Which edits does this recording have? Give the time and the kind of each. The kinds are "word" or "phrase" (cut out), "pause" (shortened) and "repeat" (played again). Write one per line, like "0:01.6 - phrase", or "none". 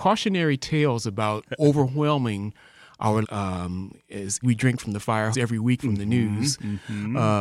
0:01.4 - word
0:03.2 - word
0:04.4 - word
0:05.3 - word
0:05.8 - word